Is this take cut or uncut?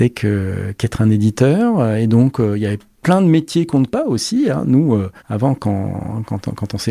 cut